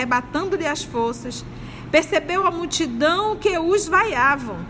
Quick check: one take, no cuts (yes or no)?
yes